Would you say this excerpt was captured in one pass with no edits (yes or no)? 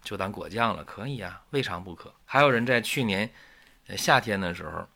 no